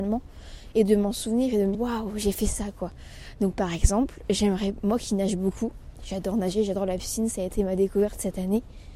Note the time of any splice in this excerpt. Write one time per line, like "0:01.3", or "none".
0:01.7